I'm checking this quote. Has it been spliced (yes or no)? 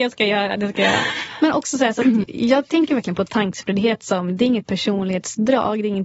yes